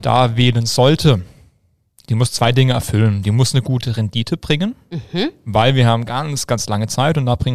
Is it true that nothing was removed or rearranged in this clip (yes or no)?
yes